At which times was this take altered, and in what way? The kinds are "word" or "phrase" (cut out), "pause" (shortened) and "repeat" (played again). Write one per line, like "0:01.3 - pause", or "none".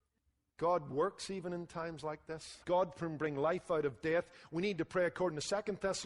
0:02.6 - pause